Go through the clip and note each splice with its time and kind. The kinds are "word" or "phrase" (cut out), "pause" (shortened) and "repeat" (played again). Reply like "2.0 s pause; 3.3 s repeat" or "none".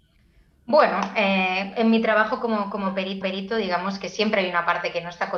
3.2 s repeat